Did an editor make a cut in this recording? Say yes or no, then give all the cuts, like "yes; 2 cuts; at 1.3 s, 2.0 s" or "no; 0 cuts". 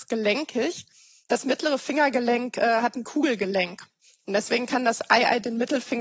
no; 0 cuts